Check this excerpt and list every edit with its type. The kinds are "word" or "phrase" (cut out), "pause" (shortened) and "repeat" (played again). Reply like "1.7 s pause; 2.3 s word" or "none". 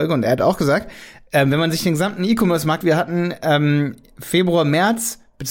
2.8 s word